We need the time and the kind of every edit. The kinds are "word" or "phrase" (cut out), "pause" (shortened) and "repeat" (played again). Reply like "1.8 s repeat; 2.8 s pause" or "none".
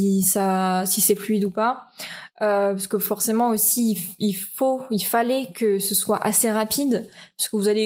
none